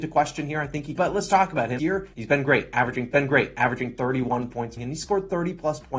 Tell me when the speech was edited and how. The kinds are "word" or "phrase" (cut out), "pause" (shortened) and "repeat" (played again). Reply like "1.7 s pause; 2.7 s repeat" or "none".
1.0 s phrase; 1.8 s phrase; 2.1 s pause; 3.1 s repeat; 4.8 s phrase